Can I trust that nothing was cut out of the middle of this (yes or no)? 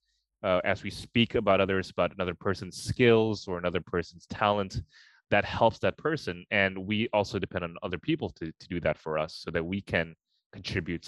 yes